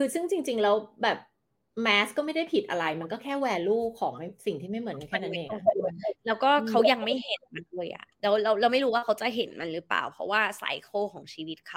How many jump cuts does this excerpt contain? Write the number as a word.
one